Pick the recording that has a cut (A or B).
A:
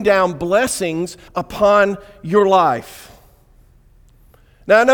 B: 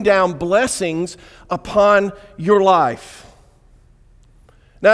A